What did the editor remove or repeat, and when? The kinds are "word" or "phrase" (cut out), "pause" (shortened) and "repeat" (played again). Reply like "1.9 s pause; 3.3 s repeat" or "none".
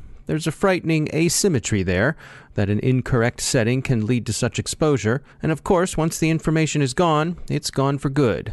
5.3 s pause